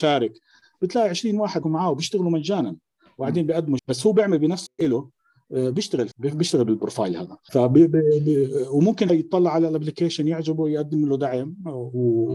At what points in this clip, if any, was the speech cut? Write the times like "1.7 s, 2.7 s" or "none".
1.6 s, 3.8 s, 4.7 s, 6.1 s, 7.5 s, 9.1 s